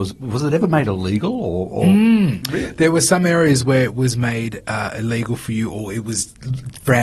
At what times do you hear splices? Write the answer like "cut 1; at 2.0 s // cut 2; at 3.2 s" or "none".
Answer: none